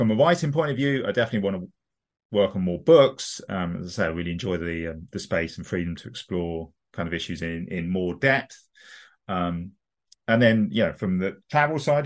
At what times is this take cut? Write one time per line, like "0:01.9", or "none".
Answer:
none

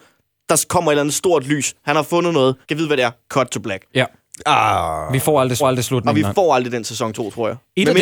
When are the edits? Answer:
0:02.6
0:05.6

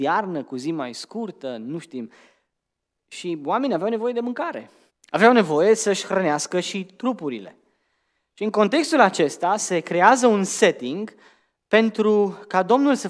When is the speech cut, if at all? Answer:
0:04.9

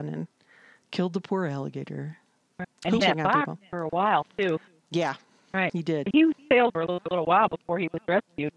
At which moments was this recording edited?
0:03.0
0:04.7
0:06.0
0:06.7

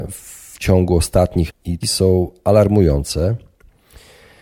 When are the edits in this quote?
0:01.5
0:01.8

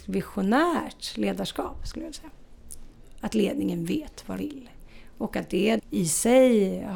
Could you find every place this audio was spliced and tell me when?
0:04.4
0:05.8

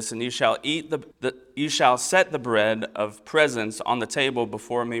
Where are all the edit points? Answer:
0:01.1

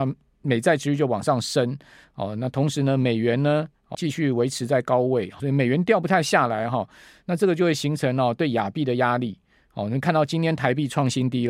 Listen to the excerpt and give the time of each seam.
0:03.9
0:05.4

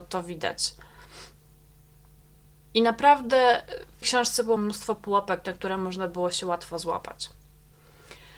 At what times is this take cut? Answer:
0:04.0
0:04.6

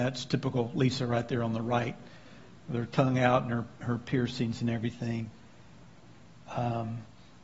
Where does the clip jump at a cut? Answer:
none

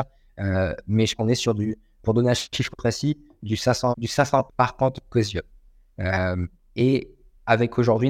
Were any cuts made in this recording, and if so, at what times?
0:01.1
0:02.7
0:03.9
0:04.5

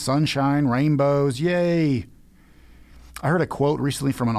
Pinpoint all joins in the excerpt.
0:03.1

